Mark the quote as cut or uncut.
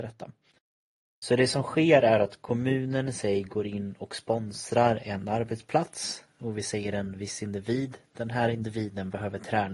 uncut